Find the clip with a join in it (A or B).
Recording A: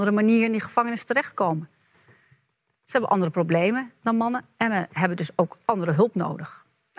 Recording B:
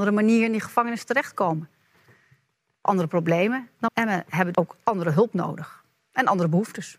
B